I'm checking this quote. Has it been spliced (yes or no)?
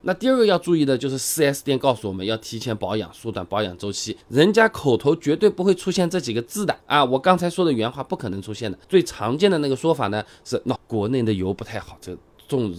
yes